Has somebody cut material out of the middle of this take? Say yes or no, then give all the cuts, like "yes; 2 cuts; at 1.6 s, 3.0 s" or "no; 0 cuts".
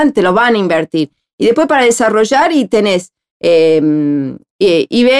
no; 0 cuts